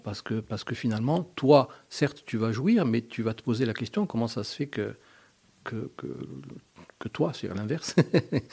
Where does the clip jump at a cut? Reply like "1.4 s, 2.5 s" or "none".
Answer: none